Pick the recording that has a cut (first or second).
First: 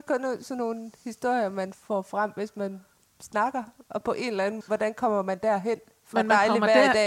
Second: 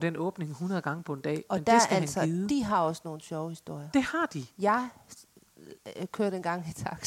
first